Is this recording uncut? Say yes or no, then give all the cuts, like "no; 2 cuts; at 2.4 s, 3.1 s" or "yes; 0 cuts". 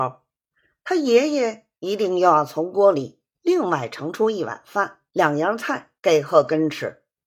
no; 3 cuts; at 1.8 s, 5.1 s, 6.0 s